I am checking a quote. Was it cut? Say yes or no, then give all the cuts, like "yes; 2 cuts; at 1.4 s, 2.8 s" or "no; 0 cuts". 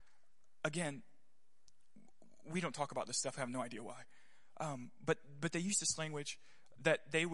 no; 0 cuts